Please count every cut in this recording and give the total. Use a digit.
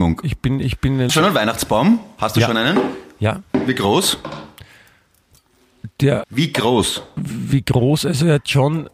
3